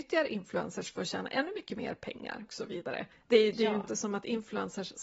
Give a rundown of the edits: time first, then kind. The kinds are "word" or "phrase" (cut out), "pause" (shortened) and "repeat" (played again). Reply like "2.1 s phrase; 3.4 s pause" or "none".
2.5 s word; 3.1 s pause